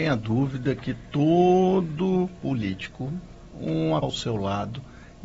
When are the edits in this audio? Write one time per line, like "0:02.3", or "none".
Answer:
0:03.5
0:04.0